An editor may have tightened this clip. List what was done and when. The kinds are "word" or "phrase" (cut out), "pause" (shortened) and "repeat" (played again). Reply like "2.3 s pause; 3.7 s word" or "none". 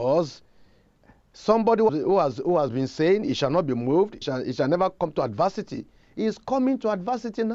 1.9 s word; 4.2 s word

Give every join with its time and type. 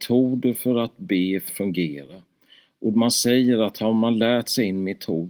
1.5 s phrase

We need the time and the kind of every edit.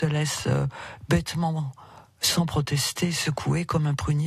none

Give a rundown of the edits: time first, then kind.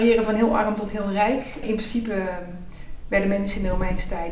none

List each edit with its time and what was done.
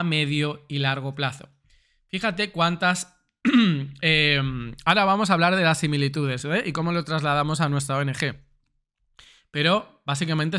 none

